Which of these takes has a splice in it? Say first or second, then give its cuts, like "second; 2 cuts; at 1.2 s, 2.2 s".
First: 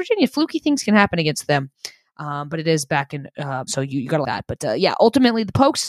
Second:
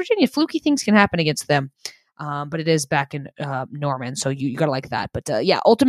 first; 2 cuts; at 3.7 s, 4.2 s